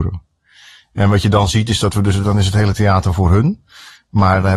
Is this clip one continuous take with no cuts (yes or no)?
yes